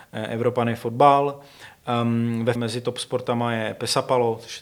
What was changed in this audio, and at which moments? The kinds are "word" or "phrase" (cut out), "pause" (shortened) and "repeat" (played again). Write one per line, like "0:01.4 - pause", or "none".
0:02.5 - word